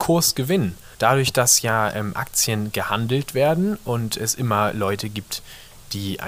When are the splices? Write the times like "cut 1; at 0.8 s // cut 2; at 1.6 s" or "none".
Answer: cut 1; at 0.9 s